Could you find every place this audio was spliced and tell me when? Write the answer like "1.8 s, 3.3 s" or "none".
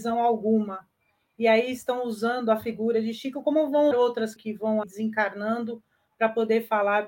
3.9 s, 4.4 s, 4.8 s